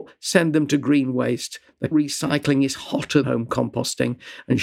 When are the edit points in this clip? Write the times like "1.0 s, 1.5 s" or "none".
1.9 s, 3.2 s